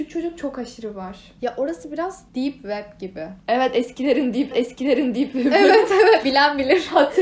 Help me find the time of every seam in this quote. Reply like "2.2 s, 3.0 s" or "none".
1.4 s, 2.3 s, 3.4 s, 4.5 s, 6.2 s